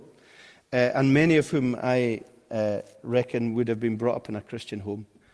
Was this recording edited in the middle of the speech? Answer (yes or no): no